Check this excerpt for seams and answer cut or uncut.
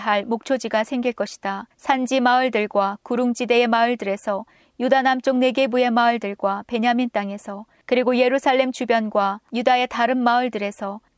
uncut